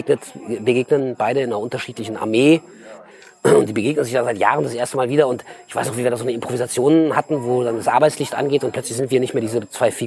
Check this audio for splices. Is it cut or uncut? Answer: uncut